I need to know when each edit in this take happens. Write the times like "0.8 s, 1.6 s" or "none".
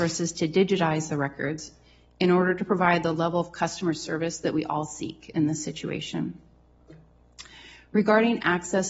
none